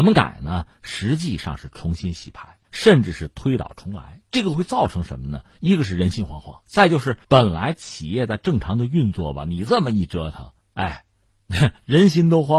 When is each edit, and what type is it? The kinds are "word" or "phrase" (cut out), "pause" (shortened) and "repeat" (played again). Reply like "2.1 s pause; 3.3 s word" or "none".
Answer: 2.6 s pause; 4.3 s pause; 5.5 s pause; 6.6 s pause; 7.2 s pause; 10.6 s pause